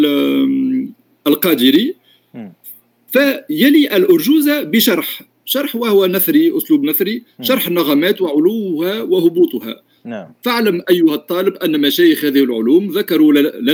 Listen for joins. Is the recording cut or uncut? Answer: uncut